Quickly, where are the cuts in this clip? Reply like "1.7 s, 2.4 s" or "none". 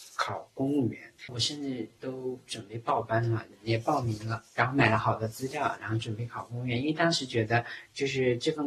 1.2 s, 4.5 s